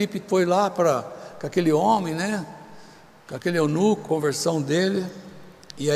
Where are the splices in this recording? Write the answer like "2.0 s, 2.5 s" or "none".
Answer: 4.1 s